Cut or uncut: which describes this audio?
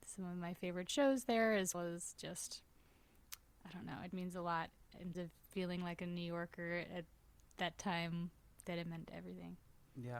cut